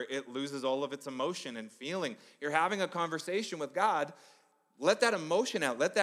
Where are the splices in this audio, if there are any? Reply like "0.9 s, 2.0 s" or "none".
none